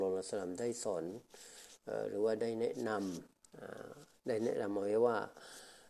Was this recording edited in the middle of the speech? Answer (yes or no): yes